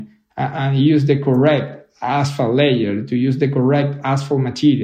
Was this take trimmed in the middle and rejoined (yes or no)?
no